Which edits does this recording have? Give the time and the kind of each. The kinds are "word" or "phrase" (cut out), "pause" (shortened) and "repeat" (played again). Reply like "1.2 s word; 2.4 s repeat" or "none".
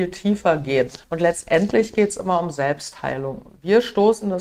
1.0 s pause